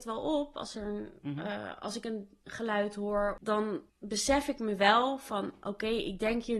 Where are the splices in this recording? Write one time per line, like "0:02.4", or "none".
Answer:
0:03.9